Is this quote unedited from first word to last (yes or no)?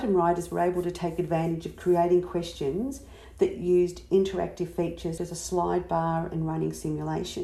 no